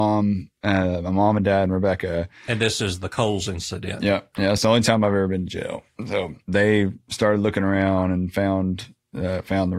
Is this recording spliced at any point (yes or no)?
yes